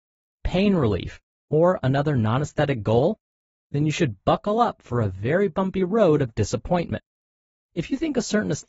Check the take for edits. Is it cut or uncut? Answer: uncut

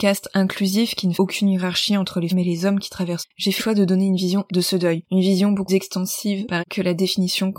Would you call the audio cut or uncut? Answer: cut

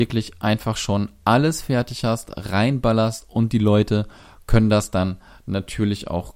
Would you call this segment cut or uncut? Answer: uncut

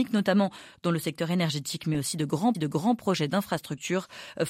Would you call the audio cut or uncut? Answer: cut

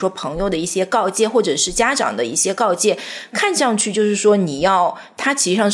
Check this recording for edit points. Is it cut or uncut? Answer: uncut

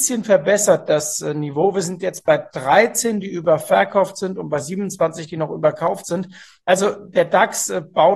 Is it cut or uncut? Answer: uncut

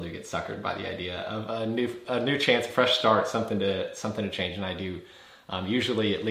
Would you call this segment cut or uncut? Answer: uncut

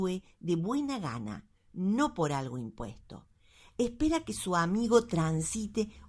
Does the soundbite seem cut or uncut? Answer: uncut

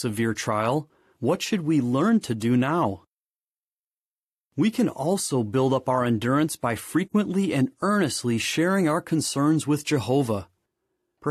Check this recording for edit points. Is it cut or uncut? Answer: uncut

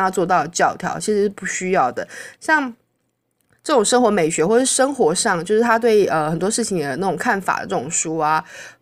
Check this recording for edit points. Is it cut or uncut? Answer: uncut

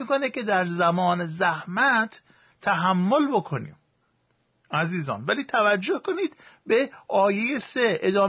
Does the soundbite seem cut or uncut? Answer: uncut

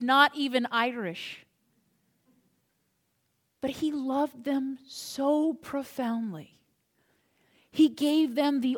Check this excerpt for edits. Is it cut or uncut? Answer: uncut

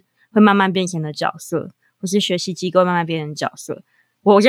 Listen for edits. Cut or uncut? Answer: uncut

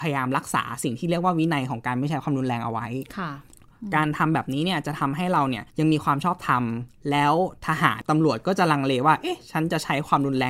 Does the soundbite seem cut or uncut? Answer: cut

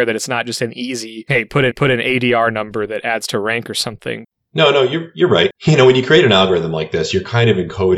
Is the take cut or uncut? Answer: cut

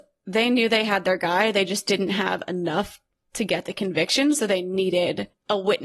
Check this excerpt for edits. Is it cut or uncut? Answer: uncut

